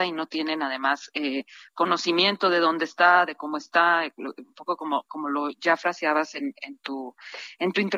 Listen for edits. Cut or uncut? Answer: uncut